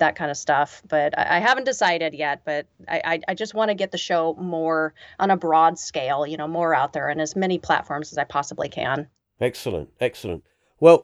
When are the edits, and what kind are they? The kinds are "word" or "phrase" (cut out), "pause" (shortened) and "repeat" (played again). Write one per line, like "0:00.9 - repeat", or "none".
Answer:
none